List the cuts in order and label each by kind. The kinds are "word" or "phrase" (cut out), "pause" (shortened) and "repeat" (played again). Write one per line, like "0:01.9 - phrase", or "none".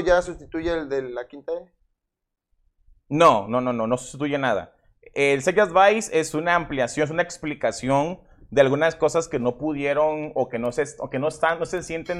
none